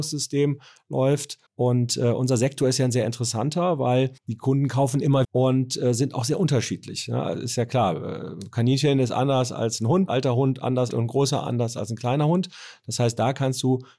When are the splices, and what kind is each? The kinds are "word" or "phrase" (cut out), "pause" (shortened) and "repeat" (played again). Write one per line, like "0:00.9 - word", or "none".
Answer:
0:01.5 - pause
0:04.2 - pause
0:05.2 - word
0:10.1 - word
0:10.9 - phrase